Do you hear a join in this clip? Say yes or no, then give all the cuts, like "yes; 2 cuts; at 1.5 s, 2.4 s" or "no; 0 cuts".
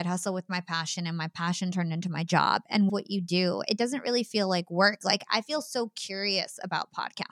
yes; 1 cut; at 2.9 s